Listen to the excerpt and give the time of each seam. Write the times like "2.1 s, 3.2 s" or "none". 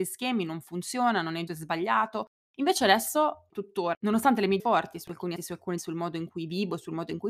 1.5 s, 3.5 s, 4.6 s, 5.4 s, 5.8 s